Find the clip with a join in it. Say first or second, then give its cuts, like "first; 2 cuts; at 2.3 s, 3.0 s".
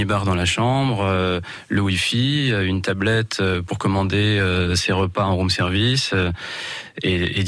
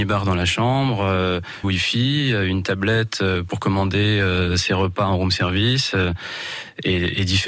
second; 1 cut; at 1.6 s